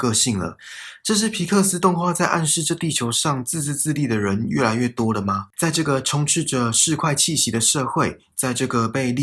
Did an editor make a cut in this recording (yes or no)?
yes